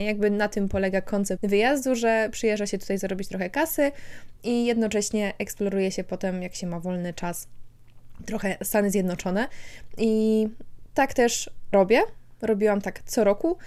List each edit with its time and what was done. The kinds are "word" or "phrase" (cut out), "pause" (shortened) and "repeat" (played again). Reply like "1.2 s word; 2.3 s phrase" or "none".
1.4 s word; 11.7 s word